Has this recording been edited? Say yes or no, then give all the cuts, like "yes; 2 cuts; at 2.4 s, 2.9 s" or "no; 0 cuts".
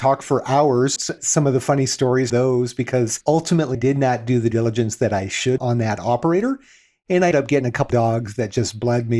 yes; 7 cuts; at 1.0 s, 2.3 s, 3.7 s, 4.5 s, 5.6 s, 7.3 s, 7.9 s